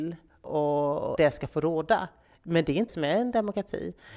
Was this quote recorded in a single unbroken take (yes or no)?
no